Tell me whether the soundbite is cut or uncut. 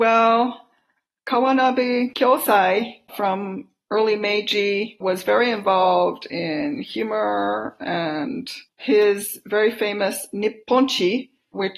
uncut